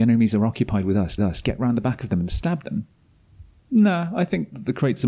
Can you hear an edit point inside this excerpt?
yes; 1 cut; at 1.2 s

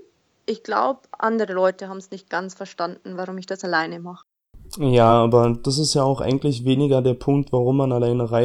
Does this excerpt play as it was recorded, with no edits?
yes; 0 cuts

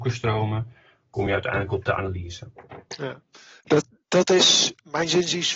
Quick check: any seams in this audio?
no; 0 cuts

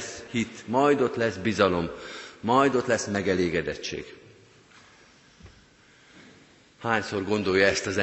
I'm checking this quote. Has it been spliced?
no; 0 cuts

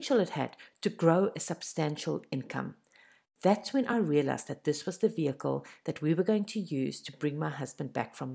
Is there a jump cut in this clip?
no; 0 cuts

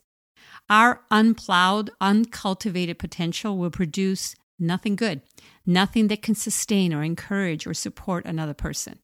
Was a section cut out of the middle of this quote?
no; 0 cuts

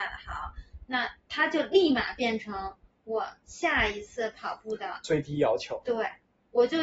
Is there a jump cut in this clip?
no; 0 cuts

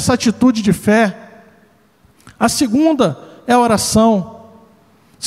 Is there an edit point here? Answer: no; 0 cuts

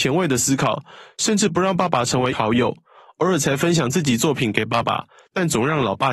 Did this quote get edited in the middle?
yes; 1 cut; at 2.3 s

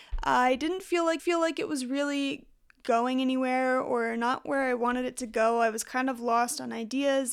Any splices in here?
yes; 1 cut; at 1.2 s

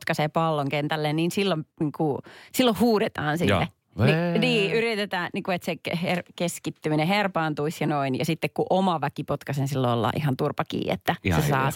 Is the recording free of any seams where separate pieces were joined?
no; 2 cuts; at 1.7 s, 2.5 s

